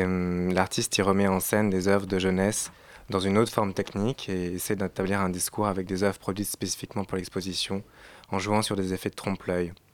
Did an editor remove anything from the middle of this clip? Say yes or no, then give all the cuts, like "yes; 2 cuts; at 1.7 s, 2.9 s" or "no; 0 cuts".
no; 0 cuts